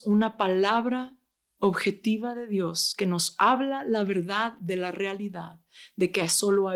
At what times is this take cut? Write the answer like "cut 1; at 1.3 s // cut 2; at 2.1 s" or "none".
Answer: none